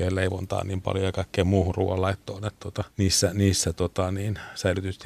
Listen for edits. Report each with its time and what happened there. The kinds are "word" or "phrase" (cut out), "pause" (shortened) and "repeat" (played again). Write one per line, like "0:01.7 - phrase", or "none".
0:02.9 - pause